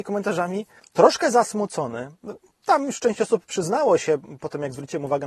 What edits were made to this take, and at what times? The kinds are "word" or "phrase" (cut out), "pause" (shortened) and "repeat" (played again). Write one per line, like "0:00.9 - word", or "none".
none